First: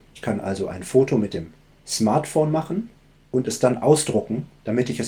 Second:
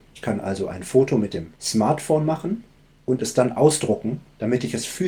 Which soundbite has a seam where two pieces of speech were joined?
second; 1 cut; at 1.6 s

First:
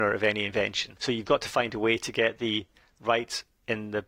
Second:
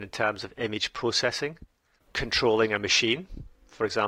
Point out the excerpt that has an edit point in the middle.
second; 1 cut; at 2.0 s

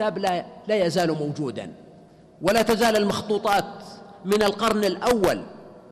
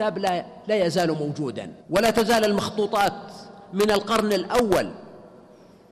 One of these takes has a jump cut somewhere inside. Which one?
second; 1 cut; at 1.8 s

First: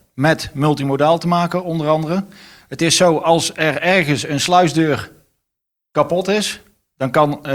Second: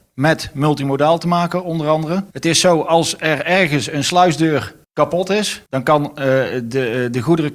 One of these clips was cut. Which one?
second; 3 cuts; at 2.3 s, 4.8 s, 5.7 s

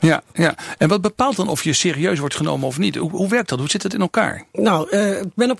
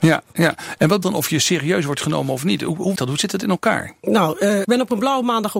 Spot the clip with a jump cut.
second; 3 cuts; at 1.0 s, 3.0 s, 4.6 s

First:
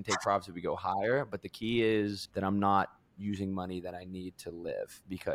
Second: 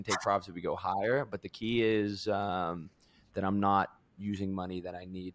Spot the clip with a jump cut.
first; 1 cut; at 2.3 s

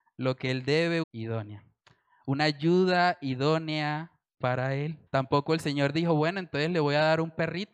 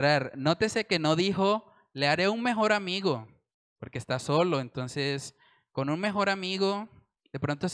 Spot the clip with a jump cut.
first; 2 cuts; at 1.0 s, 5.1 s

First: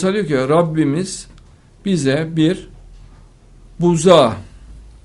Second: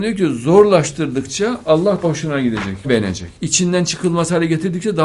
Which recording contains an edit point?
second; 3 cuts; at 2.0 s, 2.8 s, 3.3 s

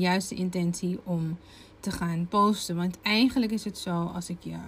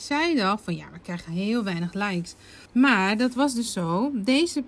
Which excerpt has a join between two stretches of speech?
second; 1 cut; at 2.7 s

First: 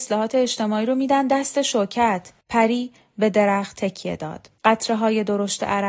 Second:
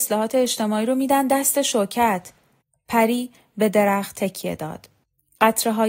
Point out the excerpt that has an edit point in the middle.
first; 2 cuts; at 2.4 s, 4.6 s

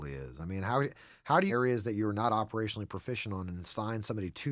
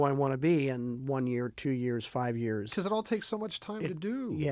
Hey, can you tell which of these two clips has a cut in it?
first; 1 cut; at 1.5 s

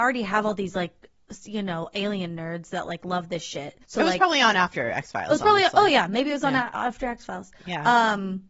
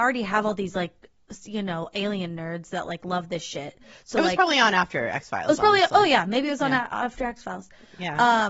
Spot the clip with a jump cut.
first; 2 cuts; at 3.8 s, 7.6 s

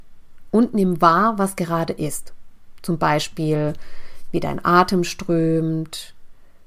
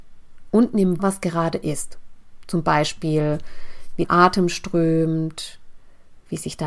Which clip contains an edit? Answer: second; 2 cuts; at 1.0 s, 4.0 s

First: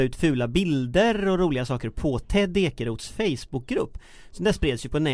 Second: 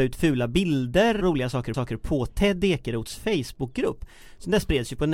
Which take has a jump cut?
second; 2 cuts; at 1.2 s, 1.7 s

